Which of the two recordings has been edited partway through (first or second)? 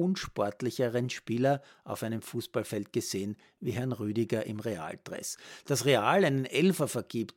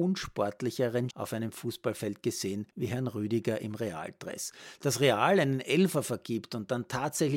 second